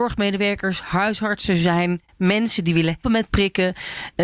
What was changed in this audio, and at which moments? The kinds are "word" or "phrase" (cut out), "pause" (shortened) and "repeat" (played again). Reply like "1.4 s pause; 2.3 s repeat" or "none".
3.0 s word